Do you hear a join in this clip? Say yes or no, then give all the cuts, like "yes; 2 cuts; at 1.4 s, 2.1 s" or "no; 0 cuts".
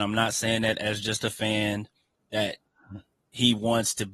no; 0 cuts